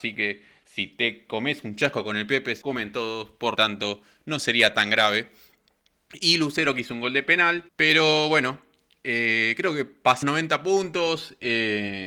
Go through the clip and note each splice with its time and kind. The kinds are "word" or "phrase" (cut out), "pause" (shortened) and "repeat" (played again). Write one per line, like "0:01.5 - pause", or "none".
0:02.6 - word
0:03.6 - word
0:07.7 - pause
0:10.2 - word